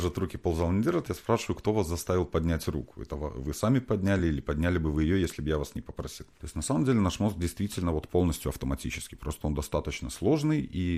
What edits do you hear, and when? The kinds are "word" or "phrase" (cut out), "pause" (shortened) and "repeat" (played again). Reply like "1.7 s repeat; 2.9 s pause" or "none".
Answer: none